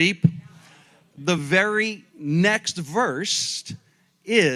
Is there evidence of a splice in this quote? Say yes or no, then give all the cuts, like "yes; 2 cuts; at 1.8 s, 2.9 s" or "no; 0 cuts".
no; 0 cuts